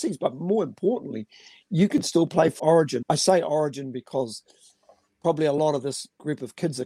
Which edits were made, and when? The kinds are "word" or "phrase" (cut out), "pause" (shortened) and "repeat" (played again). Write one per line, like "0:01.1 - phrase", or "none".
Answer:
0:02.6 - phrase
0:03.0 - word